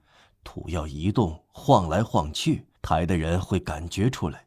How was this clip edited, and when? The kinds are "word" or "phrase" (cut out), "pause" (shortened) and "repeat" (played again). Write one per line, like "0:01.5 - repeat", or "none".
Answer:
0:02.8 - pause